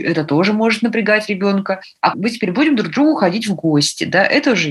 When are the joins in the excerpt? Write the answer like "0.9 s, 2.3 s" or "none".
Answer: 2.1 s

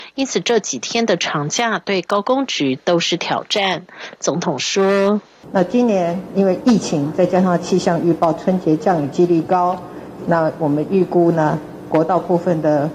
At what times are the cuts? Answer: 5.2 s

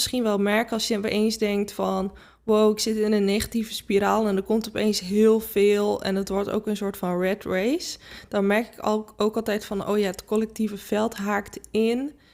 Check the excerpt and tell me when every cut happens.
none

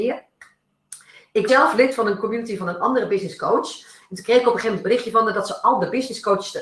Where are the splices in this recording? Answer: 1.5 s

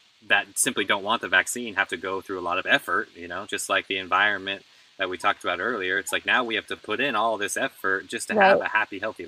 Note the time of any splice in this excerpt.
none

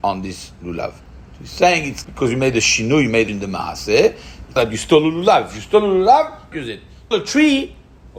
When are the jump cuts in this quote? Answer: 2.0 s, 3.3 s, 4.6 s, 6.5 s, 7.1 s

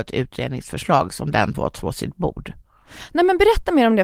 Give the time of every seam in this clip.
1.5 s

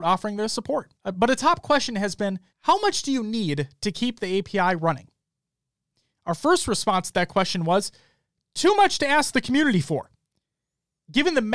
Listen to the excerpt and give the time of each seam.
1.0 s, 2.5 s

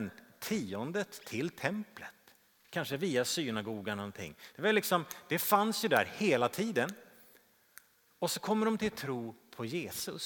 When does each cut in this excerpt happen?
none

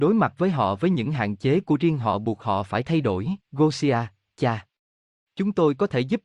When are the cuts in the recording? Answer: 3.4 s

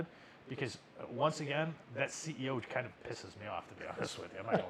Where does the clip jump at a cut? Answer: 1.8 s, 3.0 s

